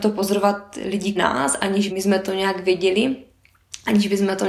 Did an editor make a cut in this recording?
yes; 2 cuts; at 1.2 s, 1.9 s

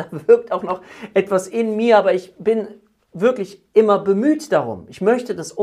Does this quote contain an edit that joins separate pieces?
no; 0 cuts

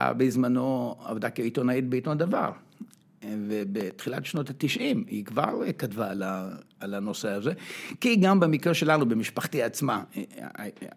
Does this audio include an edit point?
no; 0 cuts

